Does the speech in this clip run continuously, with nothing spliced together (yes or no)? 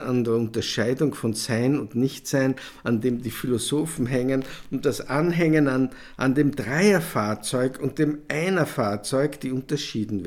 yes